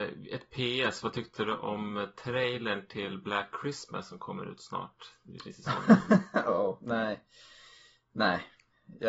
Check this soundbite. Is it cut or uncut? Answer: uncut